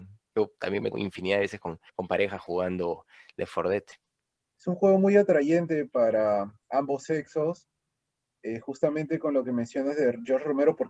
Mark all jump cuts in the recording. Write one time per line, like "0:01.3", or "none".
0:00.9
0:01.9
0:06.6